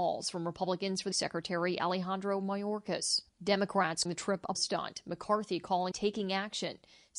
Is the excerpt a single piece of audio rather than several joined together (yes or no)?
no